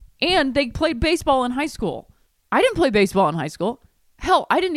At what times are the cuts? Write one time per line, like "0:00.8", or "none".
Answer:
none